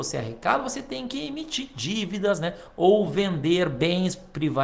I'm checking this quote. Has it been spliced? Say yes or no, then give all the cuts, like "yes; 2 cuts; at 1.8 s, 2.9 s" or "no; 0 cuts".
no; 0 cuts